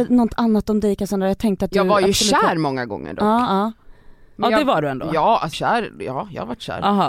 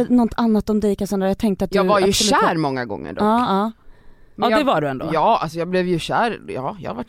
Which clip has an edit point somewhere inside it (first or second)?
first